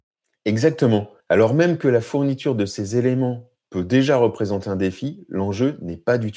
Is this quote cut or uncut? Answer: cut